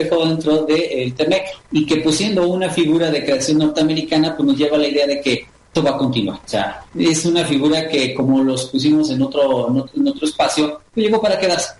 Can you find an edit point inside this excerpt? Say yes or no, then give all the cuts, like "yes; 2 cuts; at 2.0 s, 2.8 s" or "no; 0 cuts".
yes; 4 cuts; at 1.6 s, 5.8 s, 6.4 s, 6.9 s